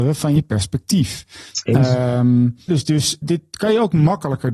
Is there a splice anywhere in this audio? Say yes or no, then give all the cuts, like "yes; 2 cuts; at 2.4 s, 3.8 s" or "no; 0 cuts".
yes; 2 cuts; at 2.7 s, 3.2 s